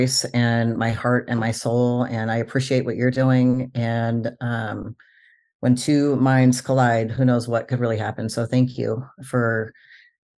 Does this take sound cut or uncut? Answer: uncut